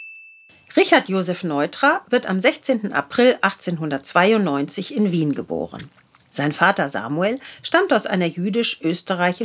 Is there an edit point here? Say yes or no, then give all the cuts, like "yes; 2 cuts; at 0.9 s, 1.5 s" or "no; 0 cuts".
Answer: no; 0 cuts